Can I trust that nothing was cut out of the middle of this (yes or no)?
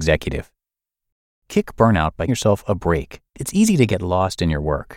no